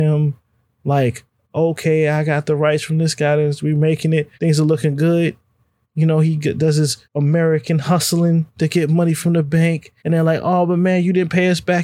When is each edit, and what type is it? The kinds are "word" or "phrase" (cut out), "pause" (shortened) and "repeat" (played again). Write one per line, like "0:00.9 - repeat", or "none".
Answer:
0:04.3 - pause
0:07.0 - pause
0:08.5 - pause
0:10.0 - pause